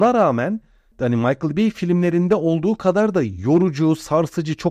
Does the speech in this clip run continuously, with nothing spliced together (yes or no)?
yes